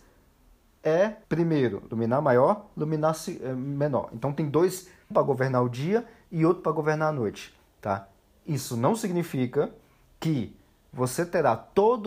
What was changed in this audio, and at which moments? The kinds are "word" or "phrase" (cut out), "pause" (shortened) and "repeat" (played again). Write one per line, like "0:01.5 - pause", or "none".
0:01.2 - pause
0:05.1 - phrase